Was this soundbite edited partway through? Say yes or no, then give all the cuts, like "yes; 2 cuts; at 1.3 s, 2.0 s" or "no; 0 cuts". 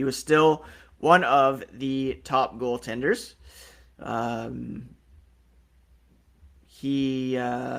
no; 0 cuts